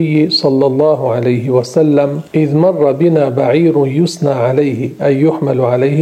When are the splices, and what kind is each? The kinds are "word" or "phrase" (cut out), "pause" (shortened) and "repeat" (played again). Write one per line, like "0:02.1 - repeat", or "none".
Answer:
0:02.3 - pause

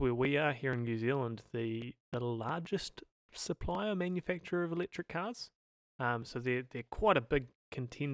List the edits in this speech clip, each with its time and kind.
0:02.0 - pause

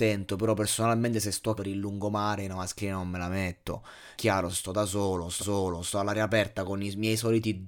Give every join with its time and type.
0:01.6 - phrase
0:04.2 - word
0:05.4 - repeat

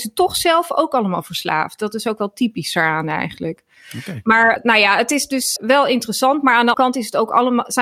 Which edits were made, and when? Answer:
0:04.6 - word
0:05.6 - word
0:06.7 - word

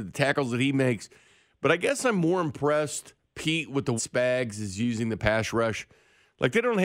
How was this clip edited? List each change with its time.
0:04.0 - phrase

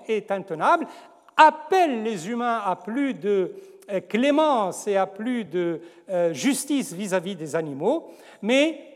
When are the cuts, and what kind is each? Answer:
none

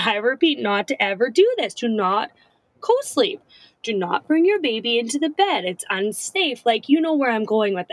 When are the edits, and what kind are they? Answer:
none

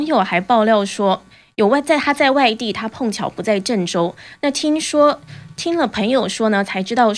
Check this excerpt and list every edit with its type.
none

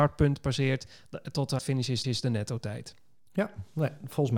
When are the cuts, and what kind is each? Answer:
0:01.6 - word
0:02.0 - repeat

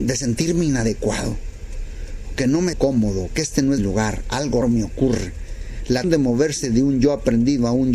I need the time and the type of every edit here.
0:02.4 - word
0:02.7 - word
0:03.3 - word
0:03.8 - word
0:04.6 - word
0:06.0 - word

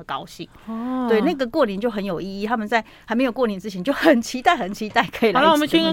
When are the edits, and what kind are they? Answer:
none

